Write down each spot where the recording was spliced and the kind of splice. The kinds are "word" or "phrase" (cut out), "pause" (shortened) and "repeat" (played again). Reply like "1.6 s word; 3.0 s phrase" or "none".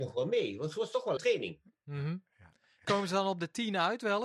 1.2 s word; 2.8 s word